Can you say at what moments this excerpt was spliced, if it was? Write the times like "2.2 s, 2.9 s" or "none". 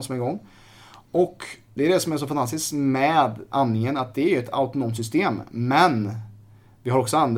3.5 s